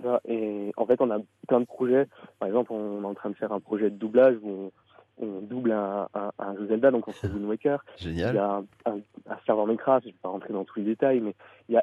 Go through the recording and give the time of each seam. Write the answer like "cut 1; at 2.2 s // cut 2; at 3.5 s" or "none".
none